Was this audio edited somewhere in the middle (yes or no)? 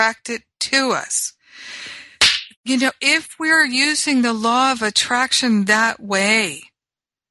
yes